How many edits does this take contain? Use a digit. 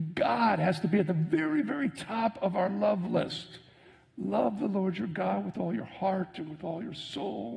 0